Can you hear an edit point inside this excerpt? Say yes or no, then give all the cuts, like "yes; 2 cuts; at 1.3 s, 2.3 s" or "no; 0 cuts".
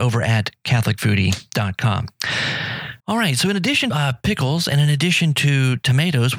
yes; 2 cuts; at 3.0 s, 3.9 s